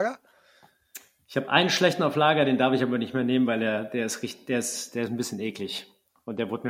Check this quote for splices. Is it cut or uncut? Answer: uncut